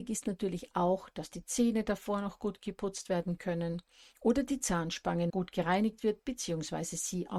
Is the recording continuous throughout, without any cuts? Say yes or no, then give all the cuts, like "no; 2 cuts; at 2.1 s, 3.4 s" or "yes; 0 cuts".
no; 1 cut; at 5.3 s